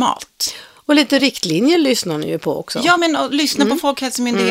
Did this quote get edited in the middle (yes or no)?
no